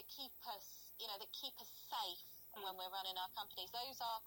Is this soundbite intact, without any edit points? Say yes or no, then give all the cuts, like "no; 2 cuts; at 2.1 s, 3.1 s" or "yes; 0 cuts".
no; 1 cut; at 2.6 s